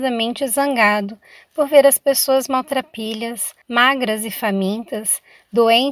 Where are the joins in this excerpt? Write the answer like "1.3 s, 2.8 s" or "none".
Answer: 3.6 s